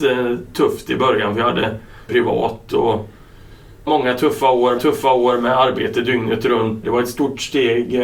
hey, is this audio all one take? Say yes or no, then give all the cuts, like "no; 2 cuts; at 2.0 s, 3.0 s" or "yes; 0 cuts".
no; 4 cuts; at 2.1 s, 3.9 s, 4.8 s, 6.8 s